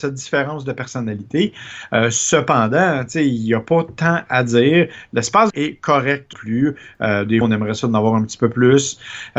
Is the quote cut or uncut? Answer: cut